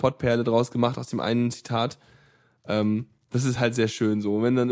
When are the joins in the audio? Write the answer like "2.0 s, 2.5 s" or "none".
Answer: none